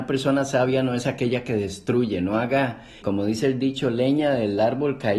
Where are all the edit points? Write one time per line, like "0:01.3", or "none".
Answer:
0:03.0